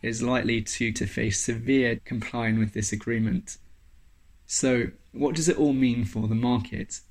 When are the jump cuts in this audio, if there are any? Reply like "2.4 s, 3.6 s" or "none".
0.9 s, 2.0 s